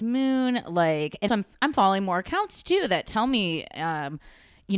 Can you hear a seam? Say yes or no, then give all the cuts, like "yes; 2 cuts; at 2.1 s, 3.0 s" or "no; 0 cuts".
yes; 1 cut; at 1.3 s